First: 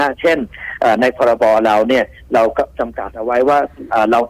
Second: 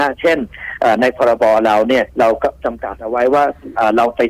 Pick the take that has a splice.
second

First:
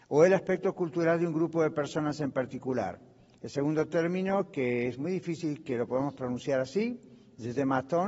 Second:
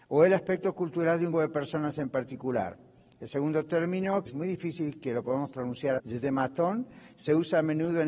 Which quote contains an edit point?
second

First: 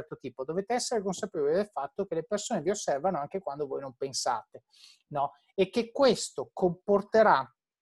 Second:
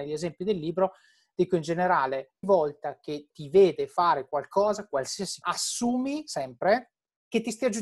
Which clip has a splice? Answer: second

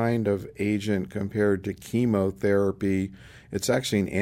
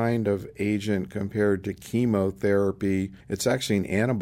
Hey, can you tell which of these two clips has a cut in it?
second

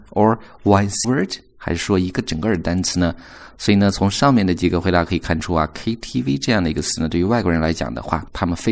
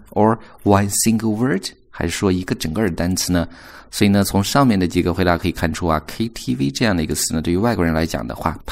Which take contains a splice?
first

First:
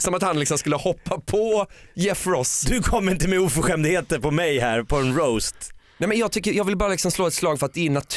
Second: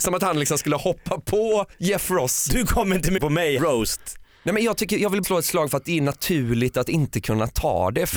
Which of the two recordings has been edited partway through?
second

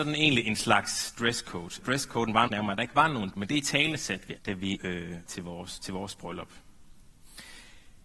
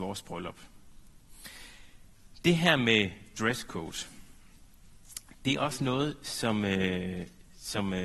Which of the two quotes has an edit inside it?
first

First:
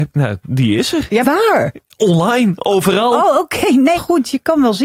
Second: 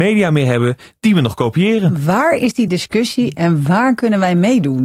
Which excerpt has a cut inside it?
first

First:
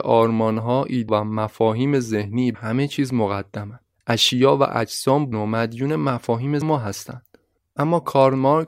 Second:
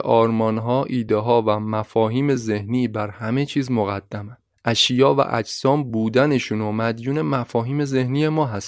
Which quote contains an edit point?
first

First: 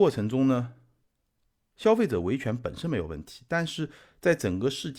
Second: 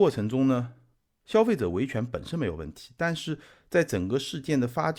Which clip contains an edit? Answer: second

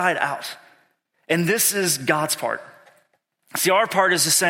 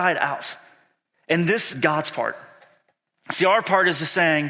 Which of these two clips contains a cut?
second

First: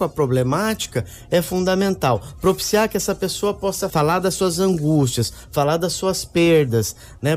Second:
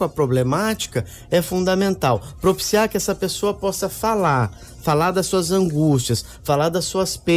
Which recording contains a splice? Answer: first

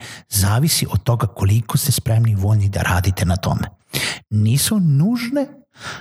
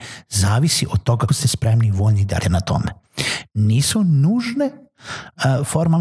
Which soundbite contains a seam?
second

